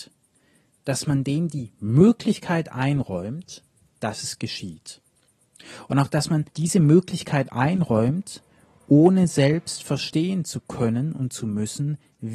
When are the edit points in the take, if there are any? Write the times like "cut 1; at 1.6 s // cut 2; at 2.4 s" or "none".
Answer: cut 1; at 6.5 s